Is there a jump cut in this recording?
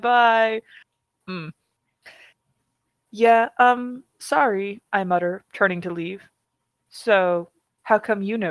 no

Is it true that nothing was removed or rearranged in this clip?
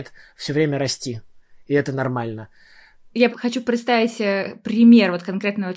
no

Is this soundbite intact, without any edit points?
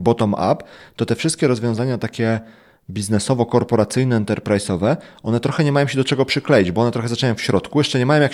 yes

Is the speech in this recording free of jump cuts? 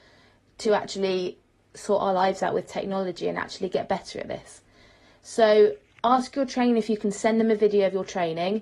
yes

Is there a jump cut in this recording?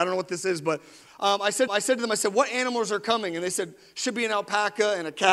yes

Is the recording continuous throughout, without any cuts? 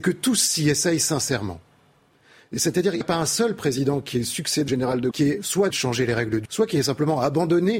no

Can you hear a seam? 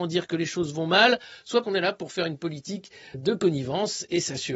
yes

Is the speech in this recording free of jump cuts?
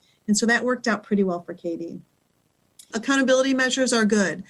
yes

